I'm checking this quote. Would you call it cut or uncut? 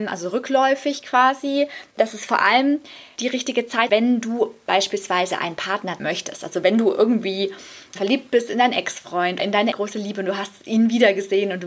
cut